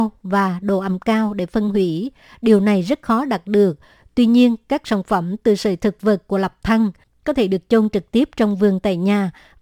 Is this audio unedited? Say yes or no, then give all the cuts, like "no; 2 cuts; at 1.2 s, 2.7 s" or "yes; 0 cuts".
yes; 0 cuts